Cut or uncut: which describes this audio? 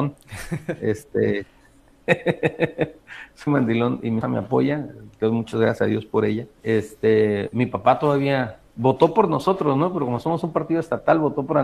cut